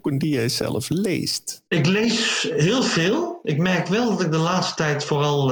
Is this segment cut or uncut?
cut